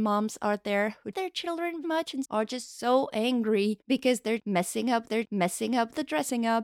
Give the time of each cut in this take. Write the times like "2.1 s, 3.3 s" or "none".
1.1 s, 1.8 s, 2.2 s, 3.8 s, 5.1 s

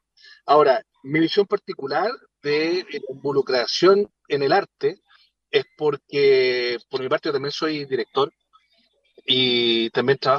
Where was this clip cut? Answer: none

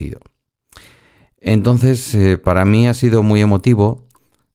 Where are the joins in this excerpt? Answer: none

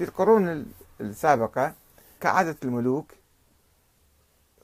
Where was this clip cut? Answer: 2.2 s

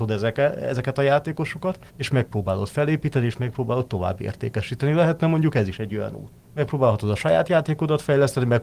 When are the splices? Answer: 1.9 s

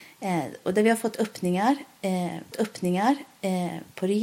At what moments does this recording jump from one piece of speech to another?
2.5 s

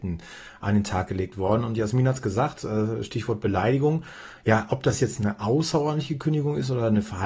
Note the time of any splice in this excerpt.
none

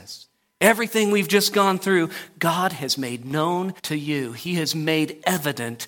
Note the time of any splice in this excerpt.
3.8 s

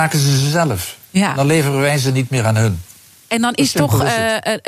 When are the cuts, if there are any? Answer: none

